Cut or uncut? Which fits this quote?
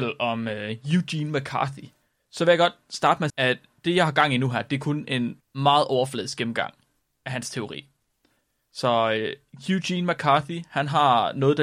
cut